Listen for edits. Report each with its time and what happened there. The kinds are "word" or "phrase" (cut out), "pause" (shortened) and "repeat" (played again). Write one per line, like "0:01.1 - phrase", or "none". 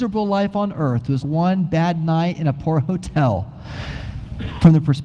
0:01.2 - word